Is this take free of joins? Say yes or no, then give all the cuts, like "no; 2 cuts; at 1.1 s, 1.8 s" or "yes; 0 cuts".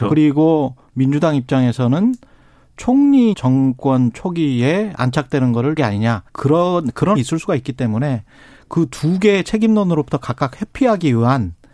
no; 4 cuts; at 3.3 s, 5.8 s, 6.3 s, 7.1 s